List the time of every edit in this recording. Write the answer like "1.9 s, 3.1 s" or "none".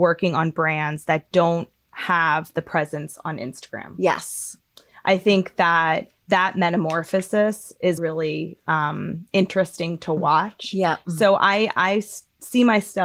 8.0 s